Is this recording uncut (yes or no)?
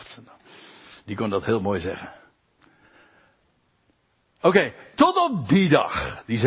yes